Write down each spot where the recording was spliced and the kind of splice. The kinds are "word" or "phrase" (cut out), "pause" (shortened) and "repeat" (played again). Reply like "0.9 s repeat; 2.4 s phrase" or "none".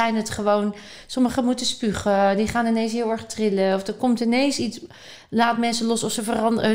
none